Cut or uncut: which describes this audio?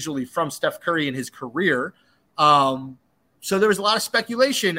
uncut